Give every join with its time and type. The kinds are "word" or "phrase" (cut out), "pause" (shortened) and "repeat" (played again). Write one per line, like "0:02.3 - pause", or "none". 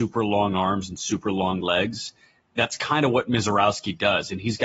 none